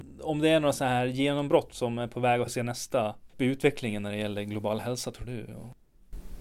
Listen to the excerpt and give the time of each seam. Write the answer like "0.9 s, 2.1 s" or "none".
2.5 s, 3.3 s